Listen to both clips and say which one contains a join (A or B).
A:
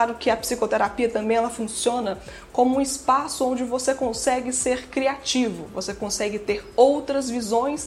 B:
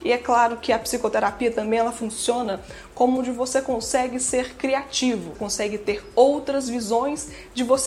B